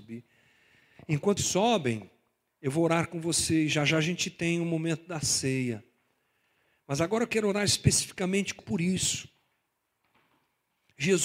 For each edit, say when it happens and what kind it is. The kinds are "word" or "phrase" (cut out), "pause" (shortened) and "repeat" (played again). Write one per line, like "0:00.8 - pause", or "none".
0:01.4 - word
0:08.6 - word